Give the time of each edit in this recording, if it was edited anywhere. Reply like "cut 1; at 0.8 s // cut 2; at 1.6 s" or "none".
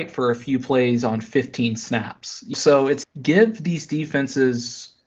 cut 1; at 2.5 s // cut 2; at 3.0 s